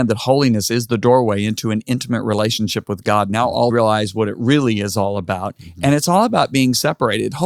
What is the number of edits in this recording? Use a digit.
1